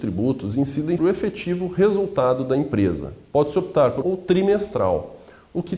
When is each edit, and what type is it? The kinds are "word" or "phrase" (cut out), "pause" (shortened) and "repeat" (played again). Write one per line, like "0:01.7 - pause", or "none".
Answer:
0:01.0 - word
0:04.0 - phrase